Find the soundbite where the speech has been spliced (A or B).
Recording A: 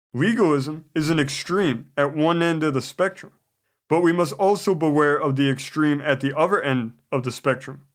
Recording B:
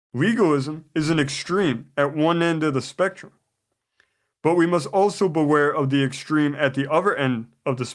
A